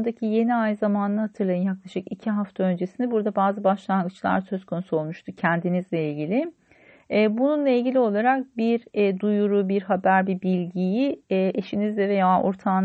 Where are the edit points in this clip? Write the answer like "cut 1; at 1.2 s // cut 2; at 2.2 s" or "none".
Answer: none